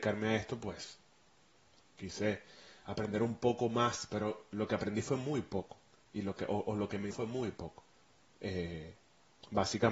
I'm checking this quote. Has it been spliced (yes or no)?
yes